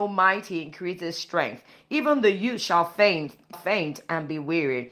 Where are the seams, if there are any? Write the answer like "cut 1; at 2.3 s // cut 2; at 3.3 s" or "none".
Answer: cut 1; at 3.5 s